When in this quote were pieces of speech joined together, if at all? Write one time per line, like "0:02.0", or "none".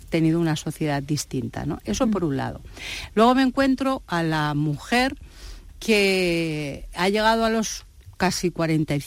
none